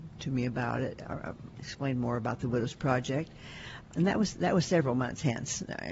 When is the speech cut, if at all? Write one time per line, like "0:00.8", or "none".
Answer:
0:01.5
0:03.9